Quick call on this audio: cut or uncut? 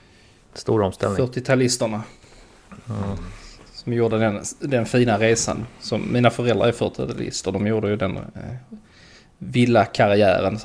uncut